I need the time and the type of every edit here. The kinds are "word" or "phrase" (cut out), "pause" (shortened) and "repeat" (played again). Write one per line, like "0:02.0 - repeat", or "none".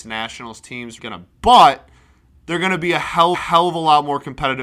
0:01.0 - word
0:01.3 - word
0:03.3 - repeat